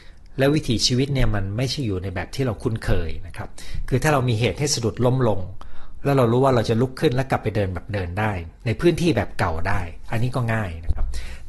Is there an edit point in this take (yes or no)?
yes